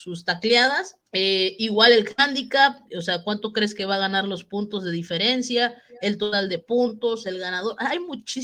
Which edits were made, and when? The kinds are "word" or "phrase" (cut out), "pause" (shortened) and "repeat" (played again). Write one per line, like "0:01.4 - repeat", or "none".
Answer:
0:01.0 - pause